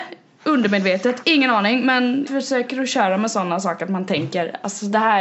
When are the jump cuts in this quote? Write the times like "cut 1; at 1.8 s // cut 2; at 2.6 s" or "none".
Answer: cut 1; at 2.3 s